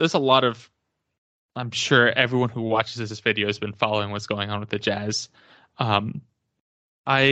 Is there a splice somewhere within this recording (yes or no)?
no